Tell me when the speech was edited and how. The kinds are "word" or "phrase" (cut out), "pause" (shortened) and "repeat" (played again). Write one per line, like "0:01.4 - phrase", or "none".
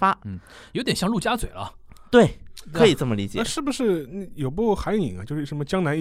none